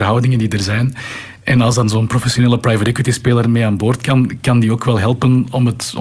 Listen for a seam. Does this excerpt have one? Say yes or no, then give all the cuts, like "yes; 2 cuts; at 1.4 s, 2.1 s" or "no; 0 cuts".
no; 0 cuts